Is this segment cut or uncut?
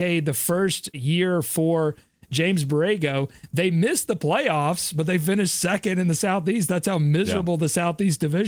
cut